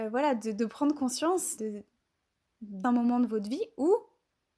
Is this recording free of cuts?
no; 2 cuts; at 1.6 s, 2.8 s

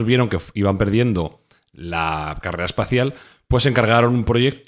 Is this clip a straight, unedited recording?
yes; 0 cuts

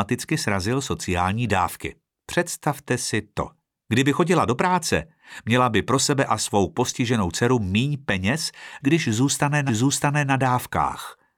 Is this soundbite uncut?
no; 3 cuts; at 3.7 s, 8.8 s, 9.7 s

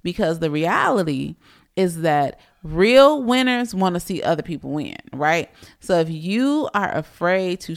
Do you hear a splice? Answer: no; 0 cuts

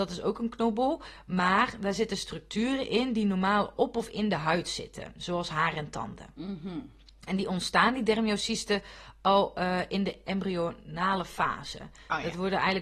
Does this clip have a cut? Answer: no; 0 cuts

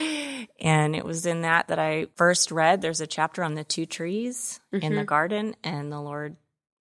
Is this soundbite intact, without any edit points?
no; 1 cut; at 2.1 s

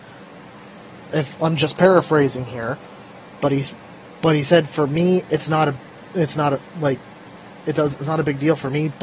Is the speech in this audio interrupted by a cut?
no; 0 cuts

